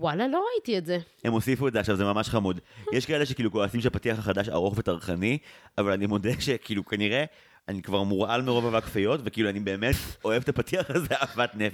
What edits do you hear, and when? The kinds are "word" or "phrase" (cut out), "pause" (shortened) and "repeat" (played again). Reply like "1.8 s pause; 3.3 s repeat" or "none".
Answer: none